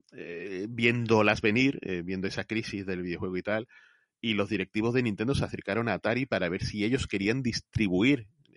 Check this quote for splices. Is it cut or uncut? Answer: uncut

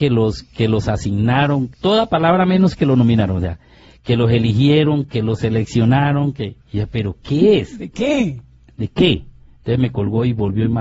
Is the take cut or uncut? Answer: cut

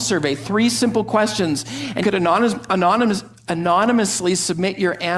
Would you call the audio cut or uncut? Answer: cut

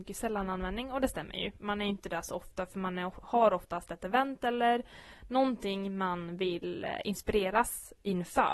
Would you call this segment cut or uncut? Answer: uncut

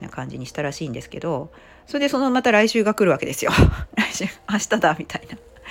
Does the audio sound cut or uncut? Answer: uncut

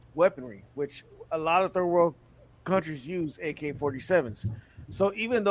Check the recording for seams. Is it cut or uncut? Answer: uncut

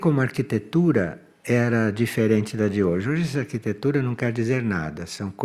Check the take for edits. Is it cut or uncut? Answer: uncut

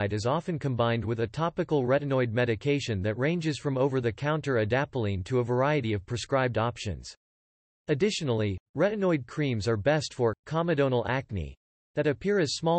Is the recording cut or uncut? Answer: uncut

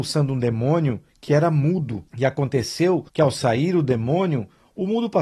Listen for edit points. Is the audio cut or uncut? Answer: cut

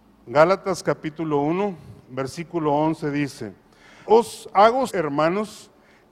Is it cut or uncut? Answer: cut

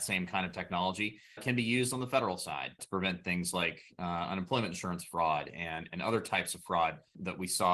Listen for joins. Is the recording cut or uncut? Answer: uncut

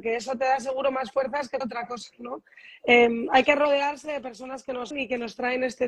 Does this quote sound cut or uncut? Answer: cut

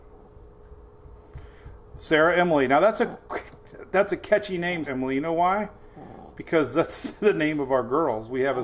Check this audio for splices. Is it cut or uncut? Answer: cut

